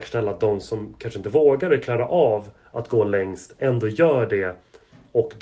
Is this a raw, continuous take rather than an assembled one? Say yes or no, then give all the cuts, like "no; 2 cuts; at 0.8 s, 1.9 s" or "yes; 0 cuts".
yes; 0 cuts